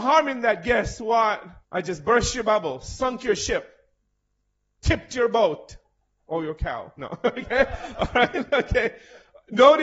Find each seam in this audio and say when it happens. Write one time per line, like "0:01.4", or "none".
0:01.6